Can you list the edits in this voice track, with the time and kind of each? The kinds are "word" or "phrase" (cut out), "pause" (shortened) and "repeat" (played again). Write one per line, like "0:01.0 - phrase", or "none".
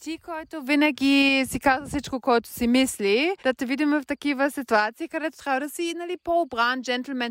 0:03.4 - pause